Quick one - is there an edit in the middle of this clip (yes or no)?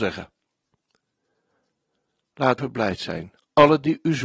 yes